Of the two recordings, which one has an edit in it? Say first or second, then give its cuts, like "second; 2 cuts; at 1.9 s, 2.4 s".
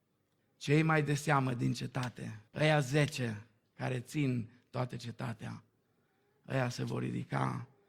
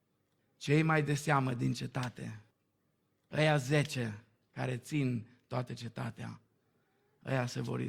first; 1 cut; at 2.5 s